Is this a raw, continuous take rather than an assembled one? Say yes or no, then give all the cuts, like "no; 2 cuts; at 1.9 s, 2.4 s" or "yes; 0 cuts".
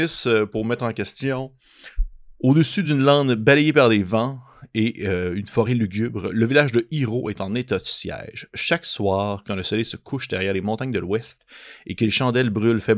yes; 0 cuts